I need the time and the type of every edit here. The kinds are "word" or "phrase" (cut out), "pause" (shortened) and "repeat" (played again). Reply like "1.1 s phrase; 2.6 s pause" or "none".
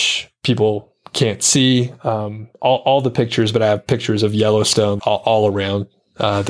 5.0 s word